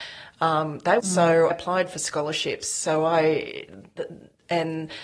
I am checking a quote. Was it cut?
yes; 2 cuts; at 1.0 s, 1.5 s

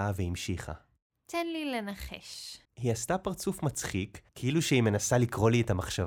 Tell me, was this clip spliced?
yes; 2 cuts; at 2.6 s, 4.3 s

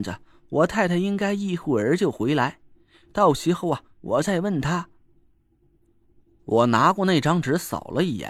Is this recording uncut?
yes; 0 cuts

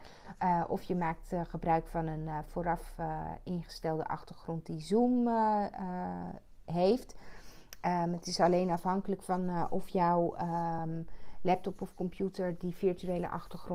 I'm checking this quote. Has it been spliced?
no; 0 cuts

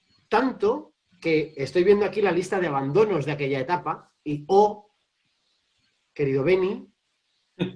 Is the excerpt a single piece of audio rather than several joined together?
no; 2 cuts; at 1.1 s, 4.2 s

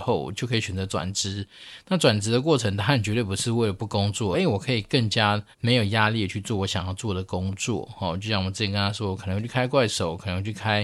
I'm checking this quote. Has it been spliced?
yes; 2 cuts; at 4.3 s, 5.5 s

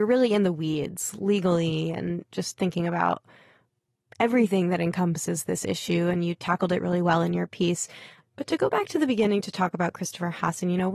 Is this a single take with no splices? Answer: yes; 0 cuts

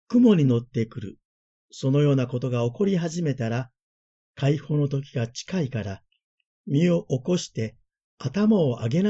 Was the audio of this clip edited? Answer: no; 0 cuts

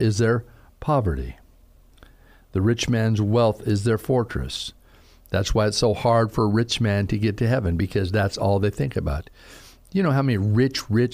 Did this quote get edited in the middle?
no; 0 cuts

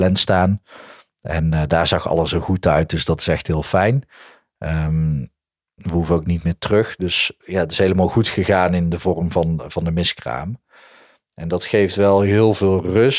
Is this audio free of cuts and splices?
yes; 0 cuts

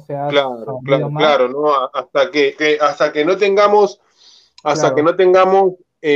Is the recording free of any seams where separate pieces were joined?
no; 1 cut; at 2.6 s

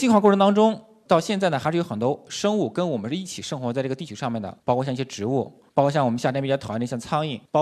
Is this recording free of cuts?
yes; 0 cuts

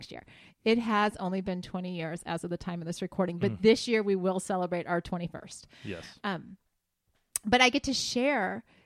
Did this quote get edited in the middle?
no; 0 cuts

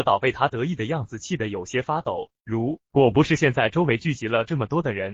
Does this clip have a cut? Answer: no; 0 cuts

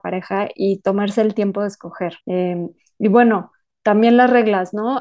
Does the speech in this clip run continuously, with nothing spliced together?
no; 1 cut; at 2.2 s

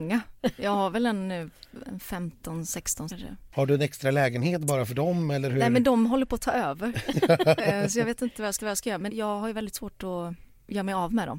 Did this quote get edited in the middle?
yes; 3 cuts; at 3.1 s, 8.6 s, 9.1 s

